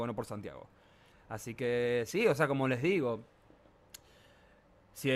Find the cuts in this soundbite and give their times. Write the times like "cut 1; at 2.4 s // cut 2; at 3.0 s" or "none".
none